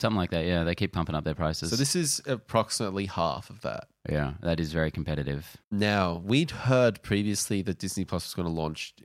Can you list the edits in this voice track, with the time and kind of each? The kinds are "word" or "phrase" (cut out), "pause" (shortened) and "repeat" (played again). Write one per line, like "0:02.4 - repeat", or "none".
0:05.6 - pause